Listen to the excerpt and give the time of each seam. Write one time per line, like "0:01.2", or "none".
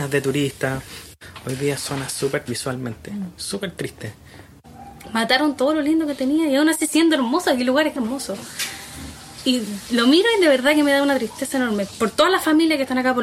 0:01.8
0:02.5
0:06.9
0:08.0
0:11.9

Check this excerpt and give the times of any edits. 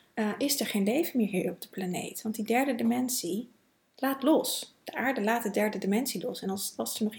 none

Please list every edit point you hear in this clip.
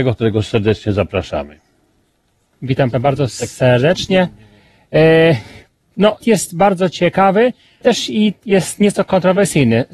0:02.9
0:06.2
0:07.8

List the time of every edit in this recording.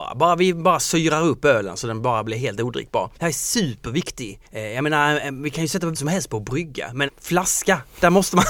0:03.1
0:04.5
0:05.9
0:07.1

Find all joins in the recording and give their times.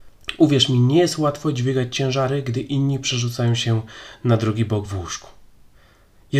none

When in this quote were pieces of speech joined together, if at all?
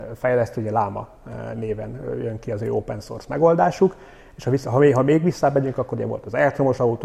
none

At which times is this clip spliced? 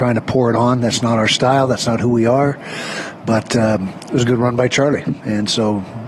none

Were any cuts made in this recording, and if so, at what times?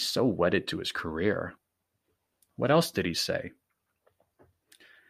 none

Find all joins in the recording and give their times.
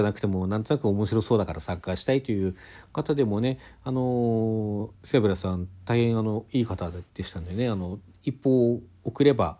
0:05.0

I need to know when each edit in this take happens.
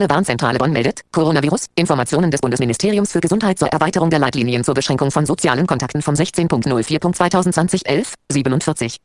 none

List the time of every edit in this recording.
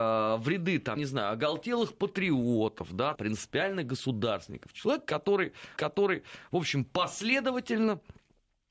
0:01.0
0:03.2
0:05.8

